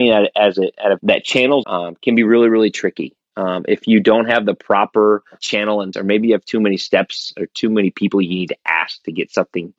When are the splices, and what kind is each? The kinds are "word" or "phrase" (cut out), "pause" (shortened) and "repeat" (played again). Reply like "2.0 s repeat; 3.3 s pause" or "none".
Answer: 1.0 s phrase; 1.6 s phrase; 5.9 s word